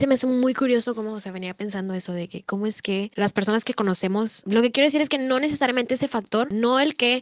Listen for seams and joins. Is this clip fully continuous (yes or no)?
yes